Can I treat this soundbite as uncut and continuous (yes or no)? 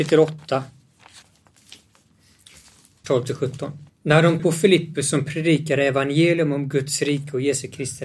no